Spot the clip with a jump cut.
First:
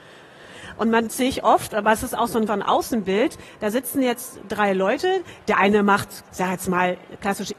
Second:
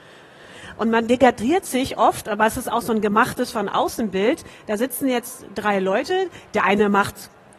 first; 3 cuts; at 1.1 s, 2.5 s, 6.3 s

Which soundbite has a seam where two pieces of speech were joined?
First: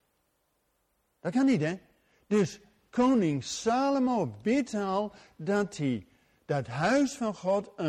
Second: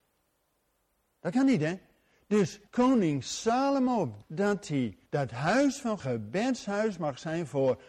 second; 4 cuts; at 2.7 s, 4.2 s, 5.1 s, 6.0 s

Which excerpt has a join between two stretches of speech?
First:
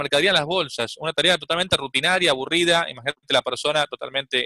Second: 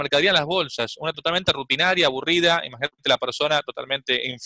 second; 1 cut; at 1.1 s

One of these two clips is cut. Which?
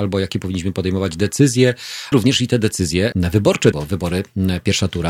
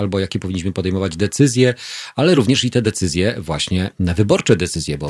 first; 3 cuts; at 2.1 s, 3.1 s, 3.7 s

